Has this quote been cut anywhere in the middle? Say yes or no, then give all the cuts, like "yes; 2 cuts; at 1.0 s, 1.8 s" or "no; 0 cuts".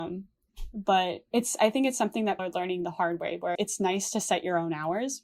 yes; 2 cuts; at 2.4 s, 3.6 s